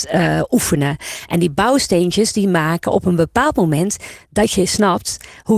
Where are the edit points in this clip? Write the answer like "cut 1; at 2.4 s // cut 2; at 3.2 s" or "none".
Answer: none